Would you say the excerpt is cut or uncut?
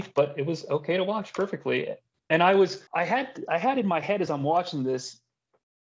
cut